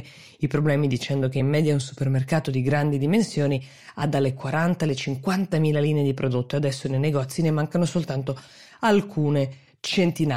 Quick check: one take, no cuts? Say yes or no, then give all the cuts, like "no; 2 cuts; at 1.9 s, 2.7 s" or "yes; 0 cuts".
yes; 0 cuts